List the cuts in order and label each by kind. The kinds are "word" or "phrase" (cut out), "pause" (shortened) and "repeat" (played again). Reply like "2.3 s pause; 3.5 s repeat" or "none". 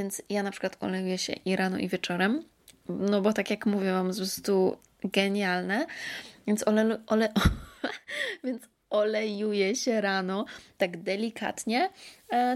none

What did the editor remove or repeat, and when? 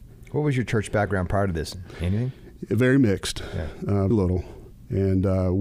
4.1 s word

